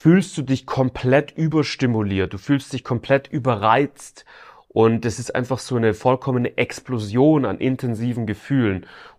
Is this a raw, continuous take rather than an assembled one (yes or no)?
yes